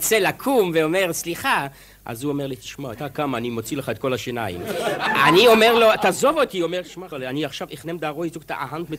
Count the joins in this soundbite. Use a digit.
2